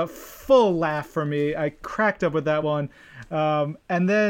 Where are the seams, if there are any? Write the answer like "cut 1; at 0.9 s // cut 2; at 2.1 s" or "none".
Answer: none